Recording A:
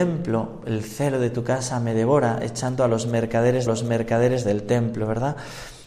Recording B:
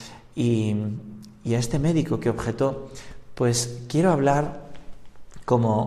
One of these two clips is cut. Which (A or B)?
A